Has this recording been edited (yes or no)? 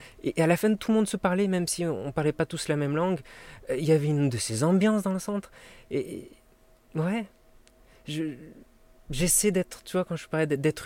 no